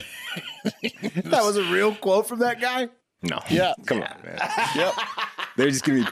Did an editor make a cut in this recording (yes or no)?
yes